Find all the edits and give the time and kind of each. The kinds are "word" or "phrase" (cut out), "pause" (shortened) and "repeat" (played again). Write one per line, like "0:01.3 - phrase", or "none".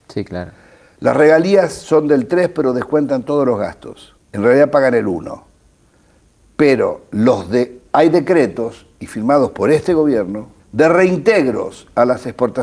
0:04.2 - pause
0:10.6 - pause